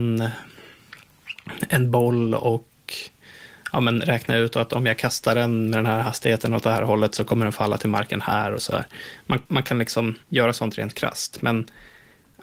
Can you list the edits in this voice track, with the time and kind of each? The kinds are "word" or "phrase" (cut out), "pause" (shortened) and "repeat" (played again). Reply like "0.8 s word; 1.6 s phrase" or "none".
9.5 s pause; 10.2 s pause